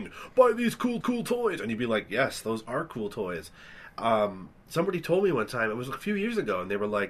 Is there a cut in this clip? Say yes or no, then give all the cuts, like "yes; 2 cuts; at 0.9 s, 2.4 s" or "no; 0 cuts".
yes; 2 cuts; at 1.0 s, 4.5 s